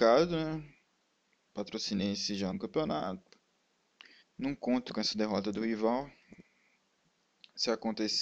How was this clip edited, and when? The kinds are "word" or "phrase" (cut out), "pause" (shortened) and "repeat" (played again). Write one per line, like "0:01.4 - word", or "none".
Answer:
0:02.5 - phrase
0:04.2 - pause
0:04.9 - word